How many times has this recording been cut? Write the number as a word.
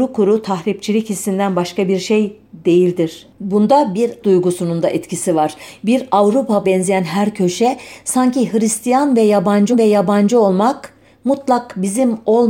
three